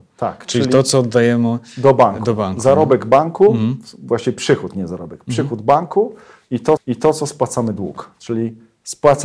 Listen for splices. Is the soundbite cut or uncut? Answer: cut